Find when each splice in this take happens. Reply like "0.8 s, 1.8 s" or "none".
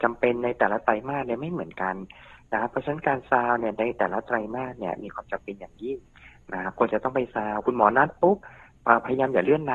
none